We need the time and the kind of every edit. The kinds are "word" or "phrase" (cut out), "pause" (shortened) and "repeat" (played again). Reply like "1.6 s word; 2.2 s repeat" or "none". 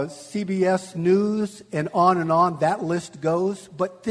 none